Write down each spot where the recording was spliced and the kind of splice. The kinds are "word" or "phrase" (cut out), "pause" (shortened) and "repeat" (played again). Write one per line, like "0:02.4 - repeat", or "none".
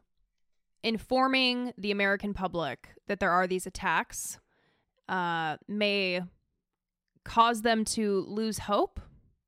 none

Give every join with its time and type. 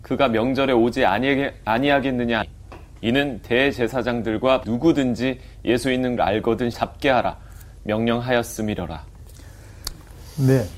0:02.4 - word
0:04.6 - word
0:06.2 - word
0:06.7 - word

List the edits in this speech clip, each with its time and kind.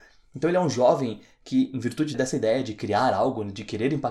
0:02.1 - word

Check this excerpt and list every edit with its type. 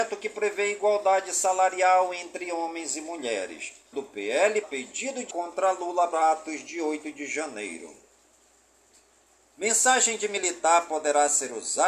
0:03.9 - word
0:04.6 - word
0:05.3 - word
0:06.1 - word

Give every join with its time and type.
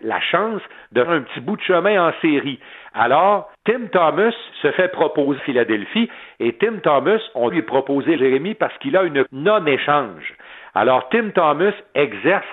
0:01.1 - word
0:03.5 - pause
0:04.5 - pause
0:05.4 - phrase
0:07.5 - word
0:08.2 - word
0:09.3 - word

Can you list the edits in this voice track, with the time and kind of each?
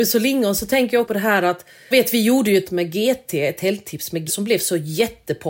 0:01.0 - word
0:01.9 - word
0:02.6 - word
0:04.3 - word

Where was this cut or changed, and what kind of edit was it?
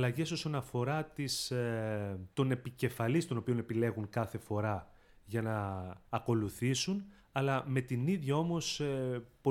0:02.3 - pause
0:06.1 - pause

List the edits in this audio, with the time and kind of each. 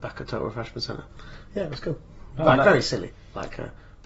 none

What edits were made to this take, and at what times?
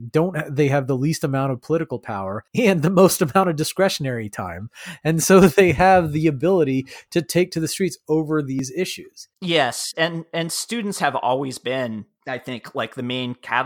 0:02.5 - pause
0:09.3 - pause

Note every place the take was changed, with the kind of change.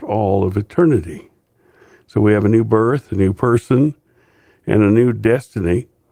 none

